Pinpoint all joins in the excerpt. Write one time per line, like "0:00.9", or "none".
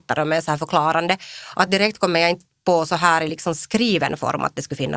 none